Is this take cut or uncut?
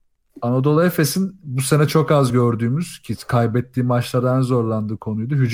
uncut